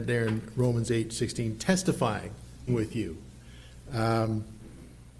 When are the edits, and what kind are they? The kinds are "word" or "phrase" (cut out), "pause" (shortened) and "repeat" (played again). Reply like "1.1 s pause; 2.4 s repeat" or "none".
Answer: 2.7 s word